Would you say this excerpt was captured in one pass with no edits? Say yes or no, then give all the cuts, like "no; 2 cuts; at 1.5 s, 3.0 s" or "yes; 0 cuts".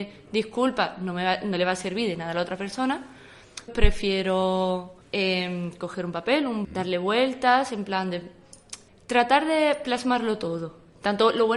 no; 4 cuts; at 3.7 s, 5.0 s, 6.6 s, 8.9 s